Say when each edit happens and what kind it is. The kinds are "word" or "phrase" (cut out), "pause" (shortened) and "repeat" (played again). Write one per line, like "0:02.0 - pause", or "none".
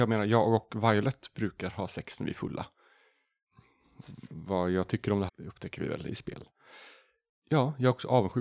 0:05.3 - word